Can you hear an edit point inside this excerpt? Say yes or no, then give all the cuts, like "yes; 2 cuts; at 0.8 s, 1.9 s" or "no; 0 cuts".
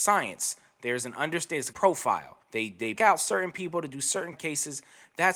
yes; 4 cuts; at 1.7 s, 2.4 s, 3.0 s, 4.3 s